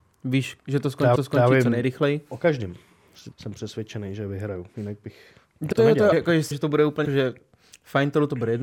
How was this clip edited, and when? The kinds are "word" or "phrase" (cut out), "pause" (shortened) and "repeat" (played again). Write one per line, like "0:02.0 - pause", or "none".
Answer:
0:01.2 - repeat
0:03.3 - word
0:05.7 - word
0:06.1 - word
0:06.5 - word
0:07.0 - word

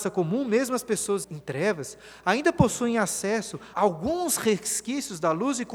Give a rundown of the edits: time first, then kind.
0:01.2 - word
0:03.7 - word

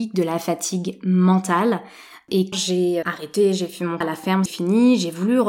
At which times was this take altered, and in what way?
0:02.5 - word
0:03.0 - word
0:04.0 - word
0:04.5 - word

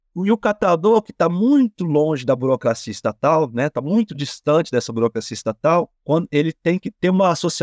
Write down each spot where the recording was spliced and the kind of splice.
0:06.0 - pause

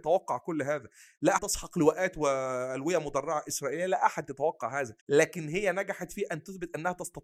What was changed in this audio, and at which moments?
0:01.4 - phrase
0:05.0 - pause

